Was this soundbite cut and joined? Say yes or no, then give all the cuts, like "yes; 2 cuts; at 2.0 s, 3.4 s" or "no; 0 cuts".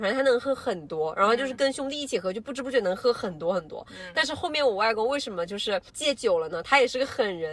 yes; 1 cut; at 5.9 s